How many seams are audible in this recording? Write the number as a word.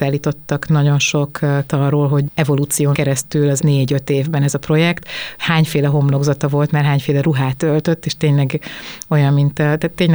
four